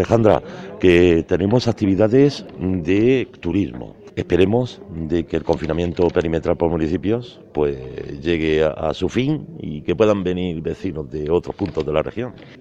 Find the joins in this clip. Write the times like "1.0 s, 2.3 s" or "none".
none